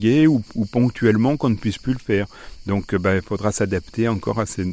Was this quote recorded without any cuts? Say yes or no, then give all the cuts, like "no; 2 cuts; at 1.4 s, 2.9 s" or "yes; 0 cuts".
yes; 0 cuts